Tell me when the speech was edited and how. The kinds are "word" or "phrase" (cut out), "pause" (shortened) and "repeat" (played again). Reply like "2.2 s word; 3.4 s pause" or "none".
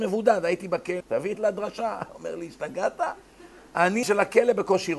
1.0 s word; 1.3 s phrase; 4.0 s word